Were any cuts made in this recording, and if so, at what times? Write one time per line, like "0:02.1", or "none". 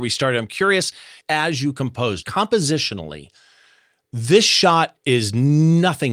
0:01.2
0:02.2

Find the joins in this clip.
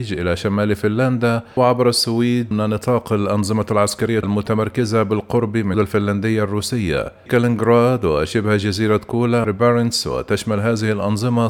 0:01.6
0:02.5
0:04.2
0:05.7
0:07.3
0:09.4

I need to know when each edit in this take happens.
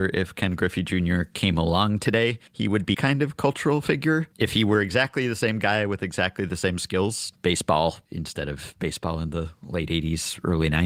0:02.5
0:02.9
0:04.3
0:07.3
0:08.1

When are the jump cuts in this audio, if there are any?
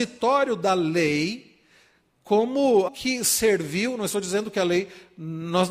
0:02.9

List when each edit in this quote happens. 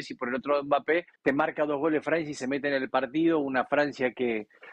0:01.2

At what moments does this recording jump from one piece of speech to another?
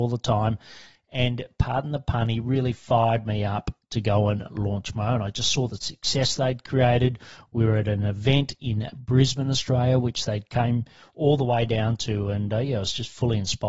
none

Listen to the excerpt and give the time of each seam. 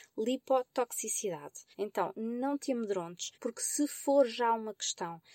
0:01.7
0:03.3

